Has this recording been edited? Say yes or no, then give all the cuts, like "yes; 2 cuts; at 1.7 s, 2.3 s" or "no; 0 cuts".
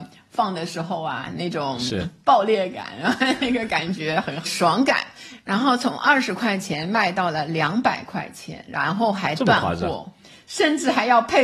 yes; 1 cut; at 4.5 s